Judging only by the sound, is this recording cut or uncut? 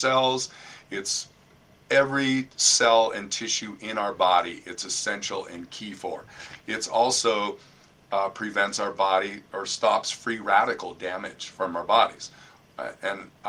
uncut